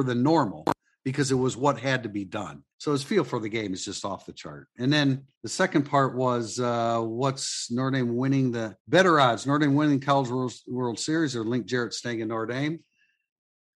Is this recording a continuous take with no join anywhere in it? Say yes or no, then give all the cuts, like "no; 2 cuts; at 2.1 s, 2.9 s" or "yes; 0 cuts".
no; 3 cuts; at 2.7 s, 5.3 s, 8.8 s